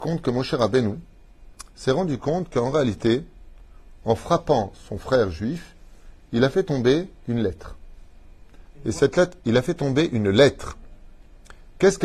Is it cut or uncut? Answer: uncut